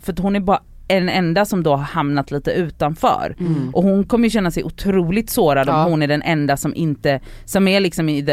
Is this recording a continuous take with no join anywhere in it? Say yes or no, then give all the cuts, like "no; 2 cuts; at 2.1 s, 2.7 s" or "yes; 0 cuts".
yes; 0 cuts